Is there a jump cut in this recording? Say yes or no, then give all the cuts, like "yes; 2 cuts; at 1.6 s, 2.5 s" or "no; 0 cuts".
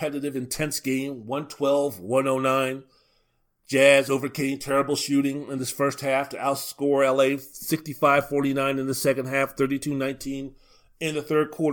no; 0 cuts